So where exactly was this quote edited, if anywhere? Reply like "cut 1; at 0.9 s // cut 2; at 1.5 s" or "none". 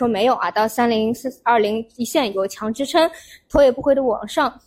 none